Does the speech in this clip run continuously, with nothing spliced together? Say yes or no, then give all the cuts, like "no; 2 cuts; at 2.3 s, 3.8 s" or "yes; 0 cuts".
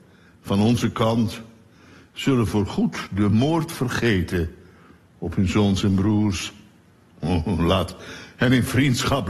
yes; 0 cuts